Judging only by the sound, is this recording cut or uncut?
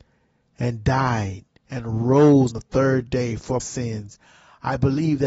cut